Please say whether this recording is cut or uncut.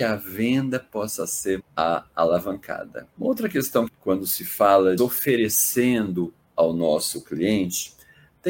cut